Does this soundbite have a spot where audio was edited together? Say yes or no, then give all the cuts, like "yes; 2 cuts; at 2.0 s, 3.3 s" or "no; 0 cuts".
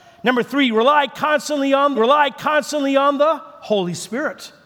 yes; 1 cut; at 1.9 s